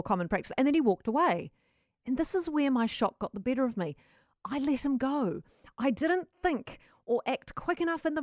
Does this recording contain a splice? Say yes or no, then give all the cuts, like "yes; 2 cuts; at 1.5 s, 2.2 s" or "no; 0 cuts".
no; 0 cuts